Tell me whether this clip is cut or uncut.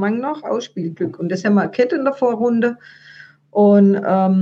uncut